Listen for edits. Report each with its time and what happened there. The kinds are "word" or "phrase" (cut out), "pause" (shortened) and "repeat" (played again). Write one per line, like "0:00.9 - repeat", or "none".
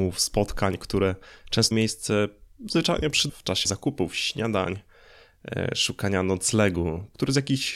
0:01.7 - word
0:03.3 - word
0:03.6 - word